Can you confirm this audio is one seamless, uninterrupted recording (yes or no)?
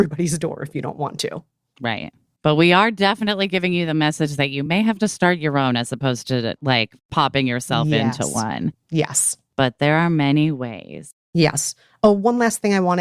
yes